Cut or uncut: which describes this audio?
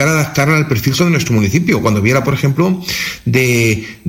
cut